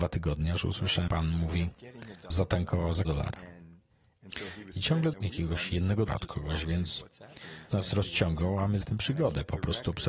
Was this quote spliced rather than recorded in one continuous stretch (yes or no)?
yes